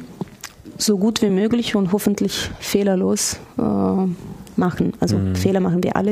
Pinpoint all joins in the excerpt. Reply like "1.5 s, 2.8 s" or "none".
none

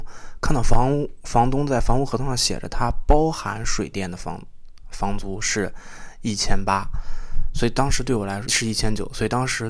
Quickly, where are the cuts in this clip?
8.5 s

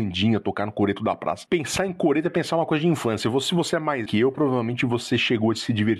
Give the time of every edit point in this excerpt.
4.1 s

